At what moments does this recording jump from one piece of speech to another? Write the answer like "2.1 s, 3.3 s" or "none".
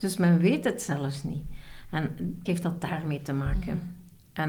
2.5 s